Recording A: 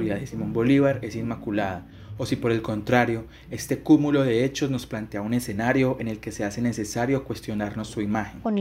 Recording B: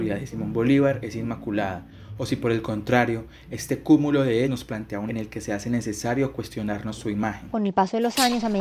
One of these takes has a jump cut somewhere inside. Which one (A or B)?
B